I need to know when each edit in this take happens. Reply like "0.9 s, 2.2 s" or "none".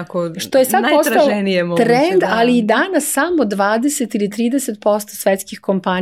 none